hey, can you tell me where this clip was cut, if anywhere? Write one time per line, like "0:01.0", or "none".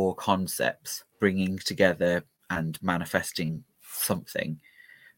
0:01.1